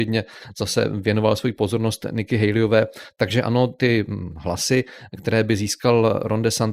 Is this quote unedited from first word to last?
yes; 0 cuts

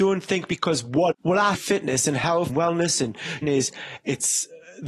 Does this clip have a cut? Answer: yes; 4 cuts; at 1.1 s, 1.5 s, 2.5 s, 3.4 s

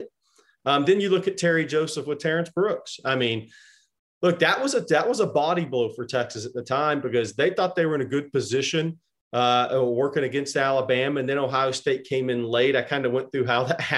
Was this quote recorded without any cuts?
yes; 0 cuts

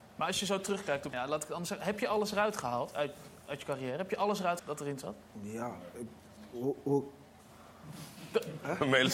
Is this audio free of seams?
no; 3 cuts; at 1.1 s, 2.9 s, 4.6 s

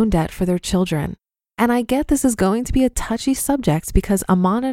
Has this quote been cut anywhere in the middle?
no; 0 cuts

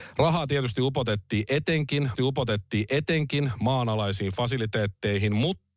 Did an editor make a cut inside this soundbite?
yes; 1 cut; at 2.2 s

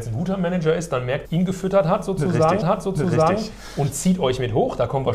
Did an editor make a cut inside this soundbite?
yes; 2 cuts; at 1.2 s, 2.6 s

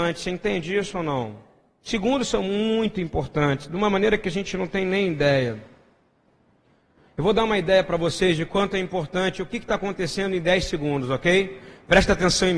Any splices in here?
no; 0 cuts

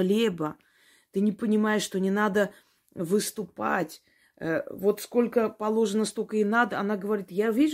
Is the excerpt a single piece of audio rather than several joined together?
yes; 0 cuts

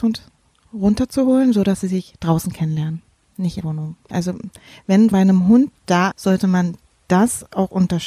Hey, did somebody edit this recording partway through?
yes; 3 cuts; at 3.6 s, 5.1 s, 6.1 s

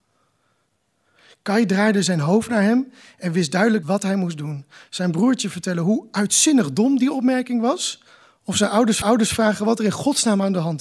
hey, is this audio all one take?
no; 2 cuts; at 3.8 s, 9.0 s

